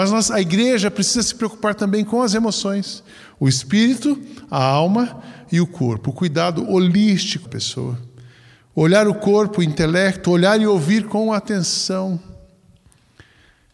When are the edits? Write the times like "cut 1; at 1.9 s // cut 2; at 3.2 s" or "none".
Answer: cut 1; at 7.5 s